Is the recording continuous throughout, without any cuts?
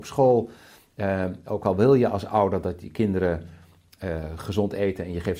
yes; 0 cuts

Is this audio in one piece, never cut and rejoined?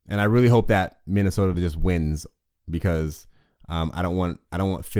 yes; 0 cuts

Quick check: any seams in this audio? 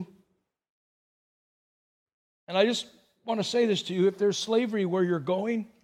no; 0 cuts

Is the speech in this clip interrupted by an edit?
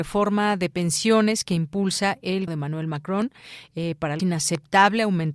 yes; 2 cuts; at 2.5 s, 4.2 s

